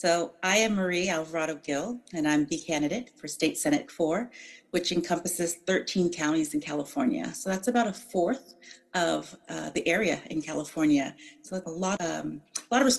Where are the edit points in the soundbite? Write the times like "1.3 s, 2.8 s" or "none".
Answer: 3.9 s, 11.6 s, 12.0 s